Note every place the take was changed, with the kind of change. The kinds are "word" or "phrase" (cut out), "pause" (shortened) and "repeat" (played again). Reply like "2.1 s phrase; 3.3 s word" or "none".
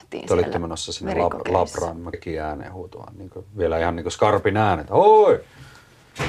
2.1 s word